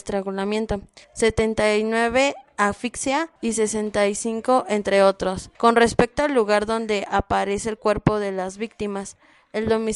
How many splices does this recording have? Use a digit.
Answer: 3